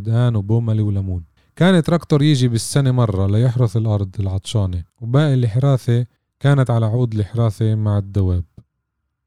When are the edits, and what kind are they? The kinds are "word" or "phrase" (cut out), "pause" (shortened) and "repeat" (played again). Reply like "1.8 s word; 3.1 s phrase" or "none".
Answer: 1.4 s pause; 4.9 s pause; 6.2 s pause